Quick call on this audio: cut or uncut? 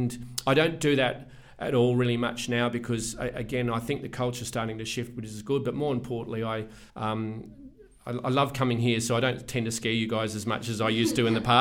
cut